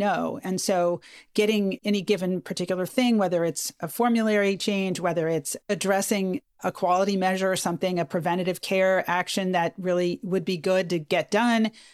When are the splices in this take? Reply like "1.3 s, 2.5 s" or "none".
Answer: none